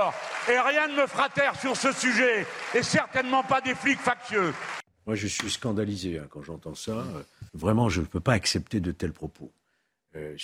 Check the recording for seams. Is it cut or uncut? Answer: cut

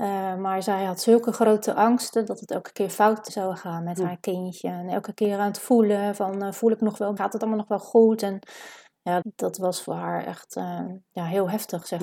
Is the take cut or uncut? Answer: cut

